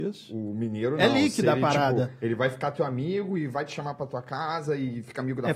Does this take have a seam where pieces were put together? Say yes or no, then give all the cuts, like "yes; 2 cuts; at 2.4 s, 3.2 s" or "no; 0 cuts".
no; 0 cuts